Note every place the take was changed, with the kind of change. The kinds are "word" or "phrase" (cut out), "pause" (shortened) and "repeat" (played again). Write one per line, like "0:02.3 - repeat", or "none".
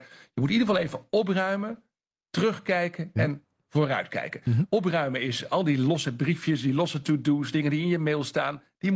none